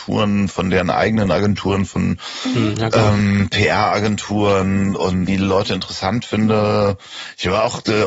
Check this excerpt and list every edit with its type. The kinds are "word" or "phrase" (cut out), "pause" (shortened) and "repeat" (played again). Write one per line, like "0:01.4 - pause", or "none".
0:05.3 - phrase